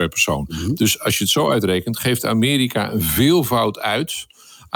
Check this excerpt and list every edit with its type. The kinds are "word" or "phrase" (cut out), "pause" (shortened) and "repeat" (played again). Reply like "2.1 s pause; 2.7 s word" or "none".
none